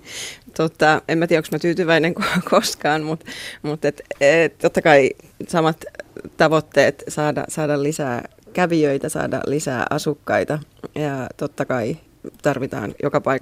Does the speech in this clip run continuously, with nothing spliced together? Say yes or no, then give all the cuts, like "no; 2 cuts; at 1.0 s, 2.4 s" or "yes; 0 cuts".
yes; 0 cuts